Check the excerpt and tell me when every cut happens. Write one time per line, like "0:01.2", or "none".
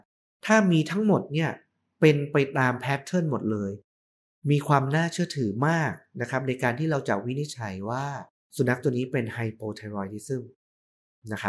0:08.3